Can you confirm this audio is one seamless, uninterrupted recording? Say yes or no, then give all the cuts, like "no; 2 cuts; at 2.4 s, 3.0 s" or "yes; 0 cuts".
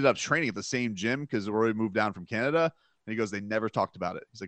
yes; 0 cuts